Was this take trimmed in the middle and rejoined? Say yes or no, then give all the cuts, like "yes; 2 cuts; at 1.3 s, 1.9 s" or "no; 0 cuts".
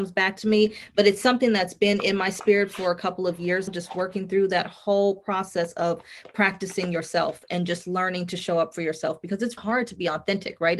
yes; 2 cuts; at 3.7 s, 9.6 s